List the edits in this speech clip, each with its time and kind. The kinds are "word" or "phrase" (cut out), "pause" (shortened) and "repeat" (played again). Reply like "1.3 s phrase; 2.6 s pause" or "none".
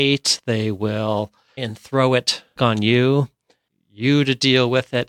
1.6 s word; 2.6 s word